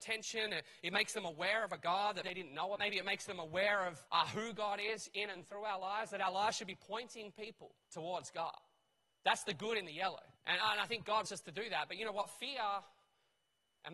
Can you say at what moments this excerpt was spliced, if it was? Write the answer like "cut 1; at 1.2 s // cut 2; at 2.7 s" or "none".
cut 1; at 2.2 s // cut 2; at 2.8 s // cut 3; at 4.1 s // cut 4; at 7.9 s // cut 5; at 10.4 s // cut 6; at 11.3 s